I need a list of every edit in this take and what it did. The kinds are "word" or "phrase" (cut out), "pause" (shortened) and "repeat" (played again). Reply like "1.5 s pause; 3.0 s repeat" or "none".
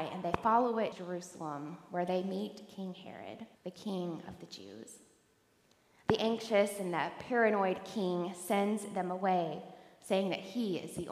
0.9 s word; 3.5 s pause